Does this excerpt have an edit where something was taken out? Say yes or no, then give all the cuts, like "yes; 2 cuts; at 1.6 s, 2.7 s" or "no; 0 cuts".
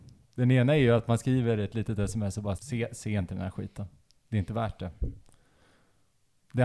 yes; 1 cut; at 2.6 s